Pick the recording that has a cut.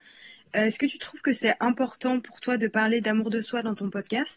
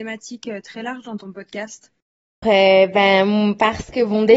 second; 1 cut; at 2.4 s

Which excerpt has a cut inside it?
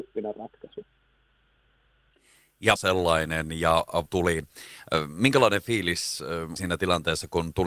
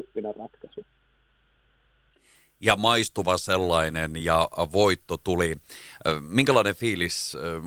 first; 3 cuts; at 2.8 s, 4.1 s, 6.6 s

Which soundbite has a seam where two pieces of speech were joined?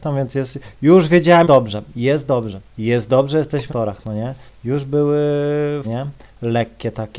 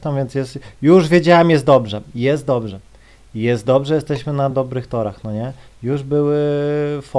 first; 4 cuts; at 1.4 s, 2.7 s, 3.7 s, 5.8 s

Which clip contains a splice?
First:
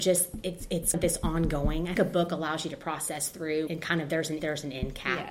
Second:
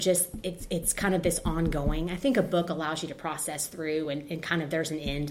first; 4 cuts; at 0.9 s, 2.0 s, 3.7 s, 4.4 s

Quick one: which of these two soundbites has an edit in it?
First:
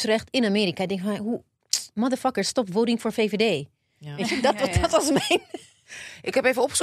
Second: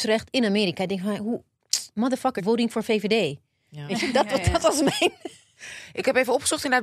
second; 1 cut; at 2.4 s

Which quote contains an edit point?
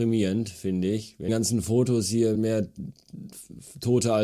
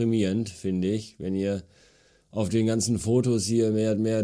first; 2 cuts; at 1.3 s, 2.3 s

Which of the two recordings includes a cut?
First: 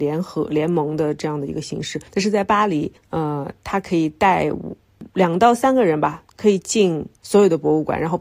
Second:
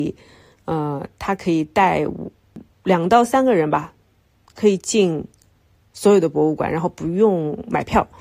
first; 5 cuts; at 2.1 s, 3.0 s, 5.1 s, 6.3 s, 7.2 s

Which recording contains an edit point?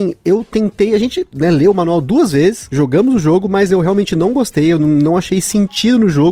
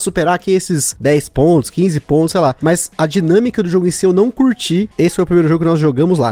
second; 1 cut; at 4.9 s

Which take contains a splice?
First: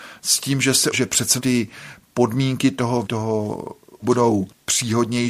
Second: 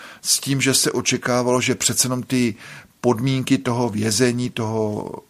first; 4 cuts; at 0.9 s, 1.4 s, 3.0 s, 4.0 s

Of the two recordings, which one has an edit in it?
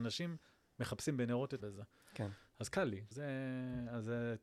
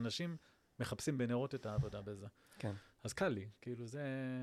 first; 2 cuts; at 1.6 s, 3.1 s

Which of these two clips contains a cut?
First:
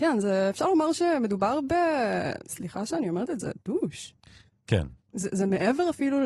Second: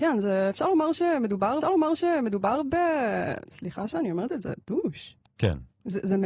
second; 2 cuts; at 1.6 s, 5.3 s

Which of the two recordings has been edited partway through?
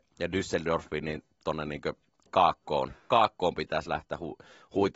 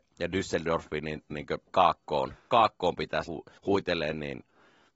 second; 4 cuts; at 1.3 s, 1.7 s, 3.3 s, 3.6 s

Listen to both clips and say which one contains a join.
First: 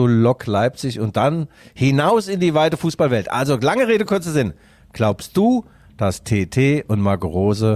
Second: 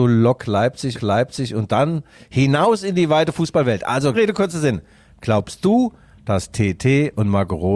second; 2 cuts; at 0.9 s, 4.1 s

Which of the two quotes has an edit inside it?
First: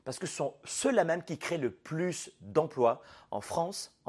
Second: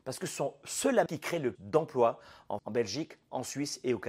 second; 3 cuts; at 1.1 s, 1.6 s, 2.6 s

